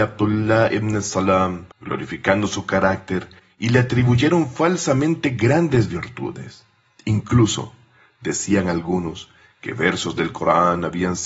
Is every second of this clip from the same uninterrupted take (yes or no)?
no